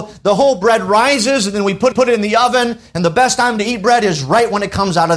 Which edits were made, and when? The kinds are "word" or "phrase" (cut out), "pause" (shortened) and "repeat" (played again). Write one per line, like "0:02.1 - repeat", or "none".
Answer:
0:01.9 - repeat